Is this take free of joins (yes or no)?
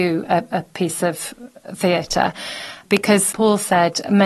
no